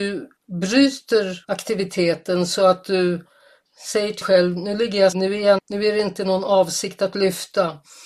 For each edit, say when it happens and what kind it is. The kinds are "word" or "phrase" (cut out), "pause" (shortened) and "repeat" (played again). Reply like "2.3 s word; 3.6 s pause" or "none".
1.4 s pause; 4.2 s word; 5.1 s word; 5.6 s word